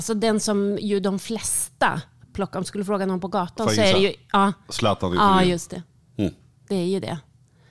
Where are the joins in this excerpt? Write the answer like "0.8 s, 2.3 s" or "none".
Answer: none